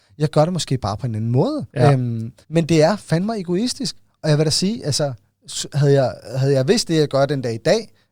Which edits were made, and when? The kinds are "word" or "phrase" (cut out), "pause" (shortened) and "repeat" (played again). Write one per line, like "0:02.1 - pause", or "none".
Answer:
0:01.7 - pause
0:02.4 - pause